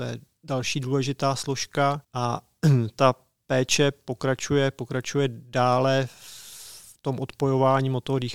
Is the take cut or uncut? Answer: cut